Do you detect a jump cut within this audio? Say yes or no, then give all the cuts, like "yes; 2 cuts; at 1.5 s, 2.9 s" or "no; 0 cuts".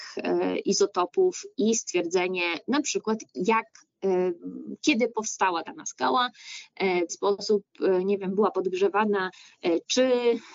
yes; 1 cut; at 7.1 s